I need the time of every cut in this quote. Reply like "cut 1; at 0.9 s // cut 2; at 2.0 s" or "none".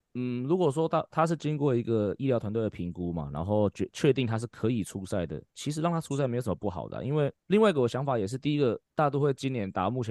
cut 1; at 5.5 s // cut 2; at 7.4 s // cut 3; at 8.8 s